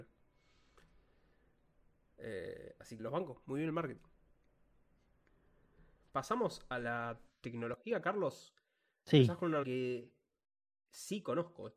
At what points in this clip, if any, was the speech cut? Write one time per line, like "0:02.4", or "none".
0:03.0
0:09.6